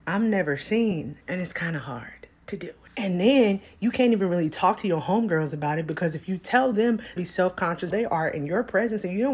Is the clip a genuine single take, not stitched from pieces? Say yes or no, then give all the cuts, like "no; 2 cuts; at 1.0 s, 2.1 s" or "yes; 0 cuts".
no; 3 cuts; at 1.2 s, 7.2 s, 7.9 s